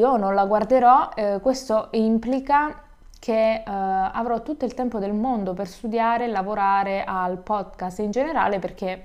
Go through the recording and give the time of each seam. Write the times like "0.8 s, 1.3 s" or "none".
none